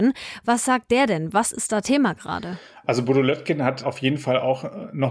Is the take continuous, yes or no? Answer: yes